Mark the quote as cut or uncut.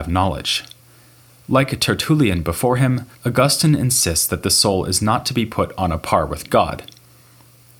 cut